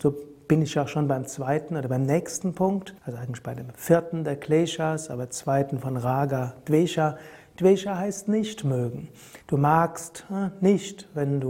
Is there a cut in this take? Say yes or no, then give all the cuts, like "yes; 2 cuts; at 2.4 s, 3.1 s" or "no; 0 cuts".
yes; 2 cuts; at 3.0 s, 9.4 s